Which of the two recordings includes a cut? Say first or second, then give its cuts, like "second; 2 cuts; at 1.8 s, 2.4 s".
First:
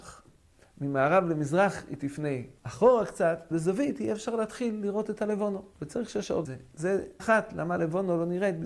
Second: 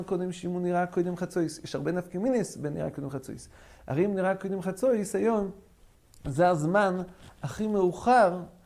first; 5 cuts; at 2.6 s, 3.5 s, 5.7 s, 6.4 s, 7.2 s